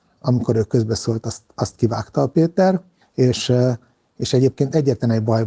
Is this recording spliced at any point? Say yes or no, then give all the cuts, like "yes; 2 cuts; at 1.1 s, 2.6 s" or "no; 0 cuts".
yes; 1 cut; at 3.0 s